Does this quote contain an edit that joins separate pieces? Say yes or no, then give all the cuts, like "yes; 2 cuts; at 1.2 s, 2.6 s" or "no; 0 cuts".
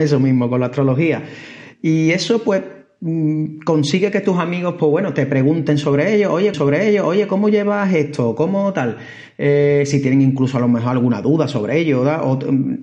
yes; 1 cut; at 6.5 s